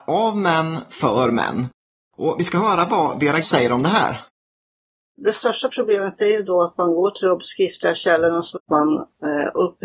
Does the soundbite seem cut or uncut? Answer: cut